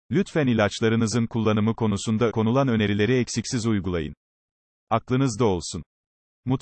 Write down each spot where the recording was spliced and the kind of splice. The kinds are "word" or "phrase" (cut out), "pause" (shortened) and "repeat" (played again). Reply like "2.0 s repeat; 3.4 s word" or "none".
2.3 s word